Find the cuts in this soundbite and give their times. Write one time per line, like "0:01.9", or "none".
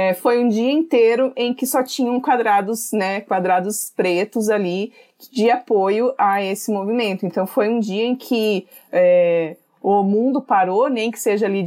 none